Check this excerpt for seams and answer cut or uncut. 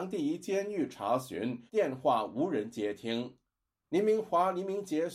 cut